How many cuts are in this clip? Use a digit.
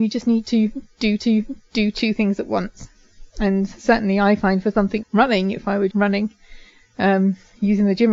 5